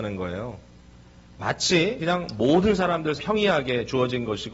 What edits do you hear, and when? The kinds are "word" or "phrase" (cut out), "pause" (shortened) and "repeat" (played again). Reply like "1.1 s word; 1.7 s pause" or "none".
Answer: 2.0 s word; 3.2 s word